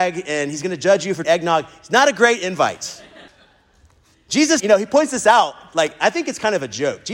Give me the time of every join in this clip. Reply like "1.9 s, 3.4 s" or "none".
1.2 s, 3.3 s, 4.6 s